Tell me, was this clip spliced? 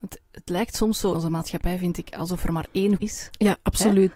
yes; 2 cuts; at 1.1 s, 3.0 s

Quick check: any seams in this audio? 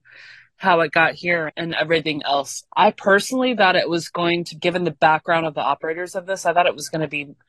yes; 3 cuts; at 1.5 s, 2.7 s, 4.6 s

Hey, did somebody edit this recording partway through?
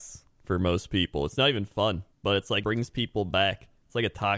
yes; 2 cuts; at 2.1 s, 2.6 s

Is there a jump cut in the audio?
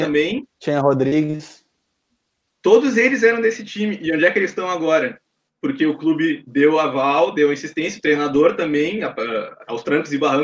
no; 0 cuts

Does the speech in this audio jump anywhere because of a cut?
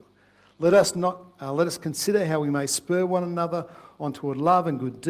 no; 0 cuts

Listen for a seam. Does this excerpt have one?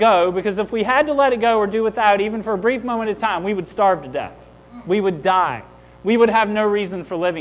no; 0 cuts

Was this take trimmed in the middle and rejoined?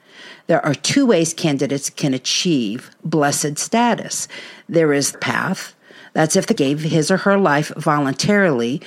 yes; 2 cuts; at 5.1 s, 6.6 s

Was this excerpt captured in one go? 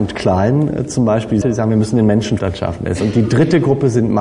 no; 2 cuts; at 1.4 s, 2.4 s

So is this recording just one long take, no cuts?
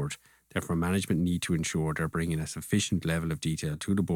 yes; 0 cuts

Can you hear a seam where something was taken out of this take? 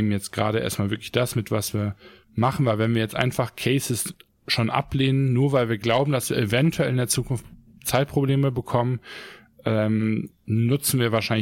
no; 0 cuts

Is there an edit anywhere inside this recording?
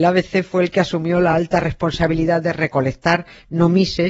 no; 0 cuts

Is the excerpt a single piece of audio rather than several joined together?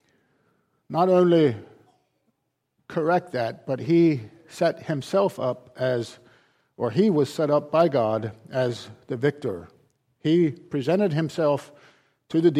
yes; 0 cuts

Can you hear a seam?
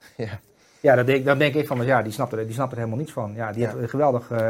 no; 0 cuts

